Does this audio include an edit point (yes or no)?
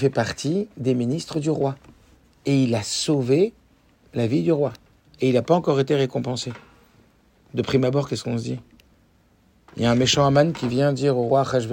no